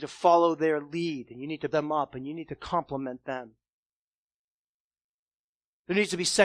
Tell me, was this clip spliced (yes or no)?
yes